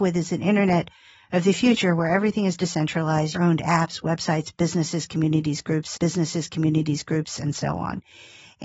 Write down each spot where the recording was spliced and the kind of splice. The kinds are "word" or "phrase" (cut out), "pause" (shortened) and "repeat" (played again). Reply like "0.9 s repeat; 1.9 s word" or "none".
3.3 s phrase; 6.0 s repeat